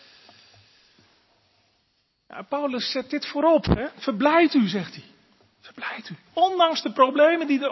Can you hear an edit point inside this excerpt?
no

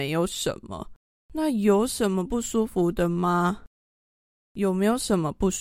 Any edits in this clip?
no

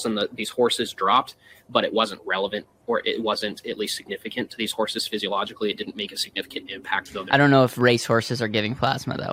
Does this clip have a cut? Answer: yes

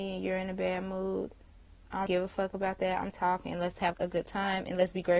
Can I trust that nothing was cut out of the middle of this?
no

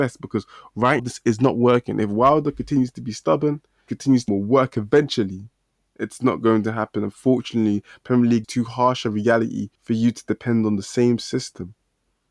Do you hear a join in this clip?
yes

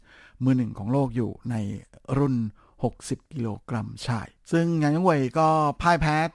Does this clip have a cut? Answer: no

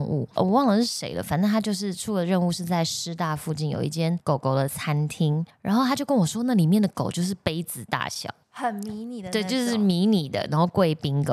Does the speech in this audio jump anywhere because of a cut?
no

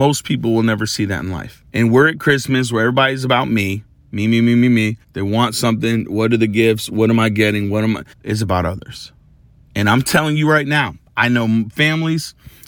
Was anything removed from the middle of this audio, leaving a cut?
yes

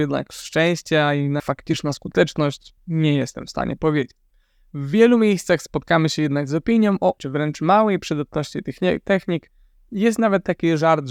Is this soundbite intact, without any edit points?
no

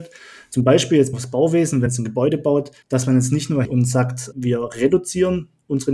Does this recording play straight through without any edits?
no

